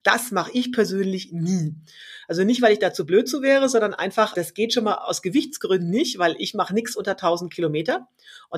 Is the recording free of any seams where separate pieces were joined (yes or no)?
yes